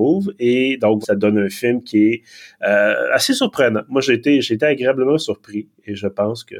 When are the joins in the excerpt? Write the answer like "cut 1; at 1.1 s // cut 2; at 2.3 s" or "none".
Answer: cut 1; at 1.0 s